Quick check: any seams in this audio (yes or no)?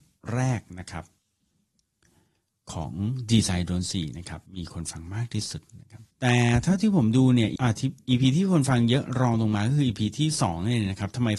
yes